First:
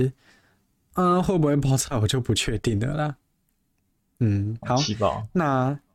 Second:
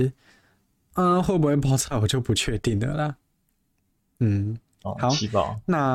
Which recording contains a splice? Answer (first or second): first